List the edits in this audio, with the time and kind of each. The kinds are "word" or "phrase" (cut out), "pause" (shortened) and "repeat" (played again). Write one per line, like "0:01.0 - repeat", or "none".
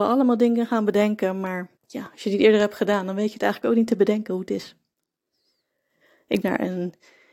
0:01.8 - pause
0:06.4 - phrase

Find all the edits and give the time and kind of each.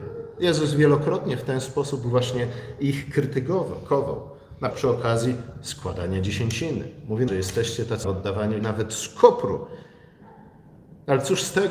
0:04.7 - word
0:07.3 - phrase
0:08.0 - word
0:08.6 - word

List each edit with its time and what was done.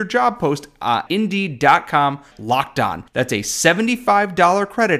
0:01.1 - word
0:02.3 - word
0:03.1 - pause

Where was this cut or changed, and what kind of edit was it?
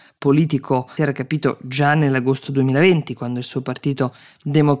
0:01.0 - phrase

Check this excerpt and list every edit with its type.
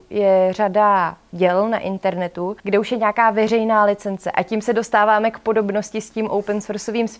0:02.6 - pause

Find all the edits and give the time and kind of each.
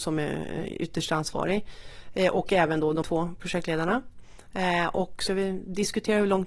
0:03.0 - word
0:05.3 - word

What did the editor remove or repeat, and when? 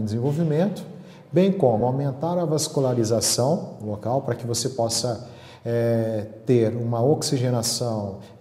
none

